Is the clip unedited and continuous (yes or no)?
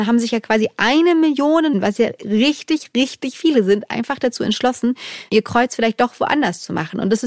no